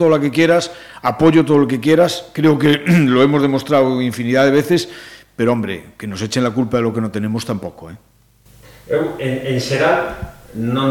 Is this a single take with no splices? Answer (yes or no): yes